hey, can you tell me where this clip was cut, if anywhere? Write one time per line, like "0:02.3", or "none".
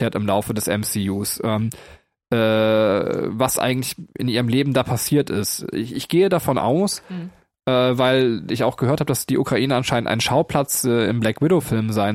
none